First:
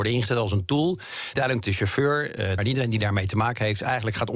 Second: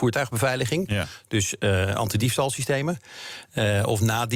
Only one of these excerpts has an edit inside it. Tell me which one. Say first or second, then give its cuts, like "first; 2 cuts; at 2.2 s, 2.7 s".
first; 2 cuts; at 1.4 s, 2.6 s